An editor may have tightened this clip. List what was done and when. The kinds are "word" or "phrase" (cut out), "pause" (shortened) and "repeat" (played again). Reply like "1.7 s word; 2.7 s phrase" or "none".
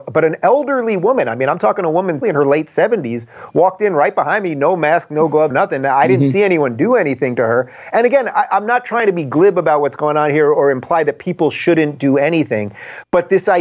2.2 s word; 5.5 s word